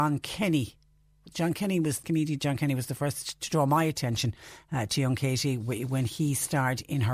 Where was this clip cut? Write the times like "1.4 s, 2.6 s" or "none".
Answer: 2.0 s